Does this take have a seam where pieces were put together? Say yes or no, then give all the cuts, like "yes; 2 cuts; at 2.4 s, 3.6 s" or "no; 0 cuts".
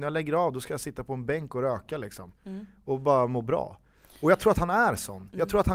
no; 0 cuts